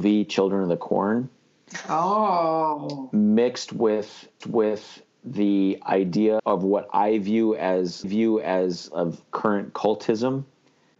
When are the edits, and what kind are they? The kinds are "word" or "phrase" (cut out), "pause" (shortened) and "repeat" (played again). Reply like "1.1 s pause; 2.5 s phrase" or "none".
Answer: 4.4 s repeat; 6.4 s word; 8.0 s repeat